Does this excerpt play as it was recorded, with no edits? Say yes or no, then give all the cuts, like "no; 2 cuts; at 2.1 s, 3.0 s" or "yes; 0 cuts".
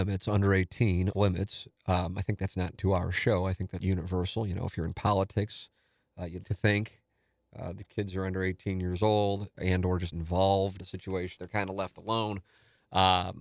no; 8 cuts; at 1.1 s, 2.8 s, 3.8 s, 6.4 s, 9.5 s, 10.1 s, 10.8 s, 11.4 s